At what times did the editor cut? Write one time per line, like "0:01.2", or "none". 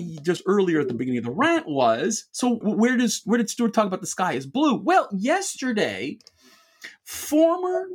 0:02.6